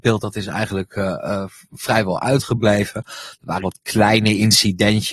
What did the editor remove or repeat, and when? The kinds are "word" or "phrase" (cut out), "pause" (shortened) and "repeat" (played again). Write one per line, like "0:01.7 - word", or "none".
0:03.6 - phrase